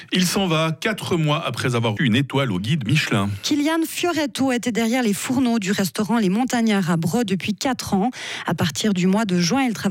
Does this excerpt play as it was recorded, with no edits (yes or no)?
no